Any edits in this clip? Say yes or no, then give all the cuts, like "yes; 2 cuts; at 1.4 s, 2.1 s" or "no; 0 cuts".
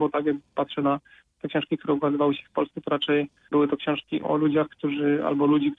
yes; 2 cuts; at 3.5 s, 4.2 s